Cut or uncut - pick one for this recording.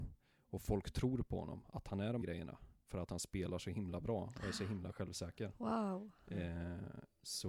cut